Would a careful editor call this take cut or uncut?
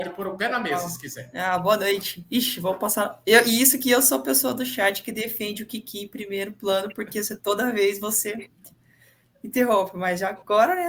uncut